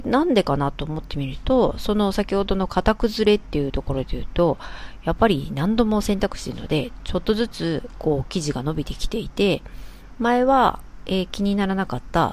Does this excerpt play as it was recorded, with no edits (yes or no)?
yes